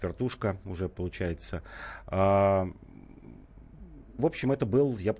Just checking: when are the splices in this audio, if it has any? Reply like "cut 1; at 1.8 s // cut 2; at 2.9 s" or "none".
cut 1; at 4.2 s